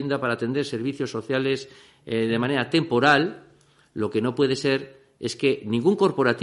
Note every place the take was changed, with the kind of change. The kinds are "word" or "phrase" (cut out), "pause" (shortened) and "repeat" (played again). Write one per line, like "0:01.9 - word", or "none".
none